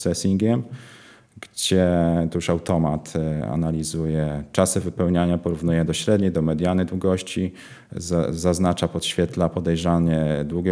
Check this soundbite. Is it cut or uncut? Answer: uncut